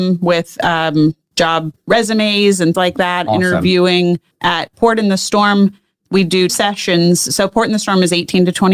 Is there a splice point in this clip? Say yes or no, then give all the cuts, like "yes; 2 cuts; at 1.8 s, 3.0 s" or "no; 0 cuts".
yes; 4 cuts; at 1.8 s, 2.7 s, 4.3 s, 6.5 s